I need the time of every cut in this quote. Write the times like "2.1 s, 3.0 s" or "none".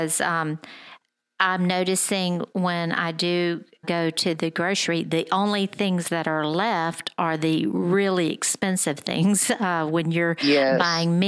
3.8 s

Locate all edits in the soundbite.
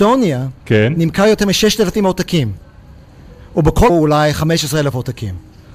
3.9 s

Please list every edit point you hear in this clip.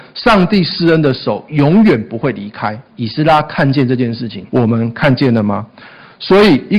2.9 s, 4.5 s

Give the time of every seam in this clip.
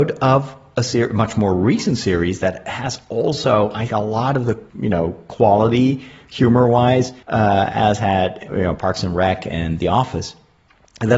3.9 s, 4.7 s, 7.2 s, 8.5 s

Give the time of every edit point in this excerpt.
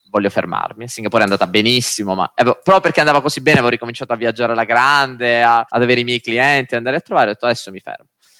5.7 s

